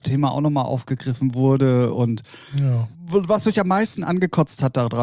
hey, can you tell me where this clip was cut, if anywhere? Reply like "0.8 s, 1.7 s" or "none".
2.9 s